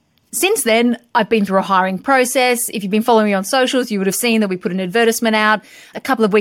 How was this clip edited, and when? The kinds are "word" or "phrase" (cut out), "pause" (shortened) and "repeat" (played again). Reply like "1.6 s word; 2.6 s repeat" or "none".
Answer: none